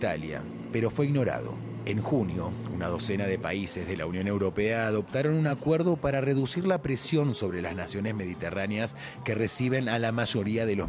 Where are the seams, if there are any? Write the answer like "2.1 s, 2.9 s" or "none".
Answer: none